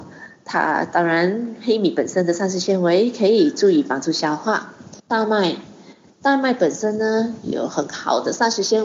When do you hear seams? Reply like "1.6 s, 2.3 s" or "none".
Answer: 5.0 s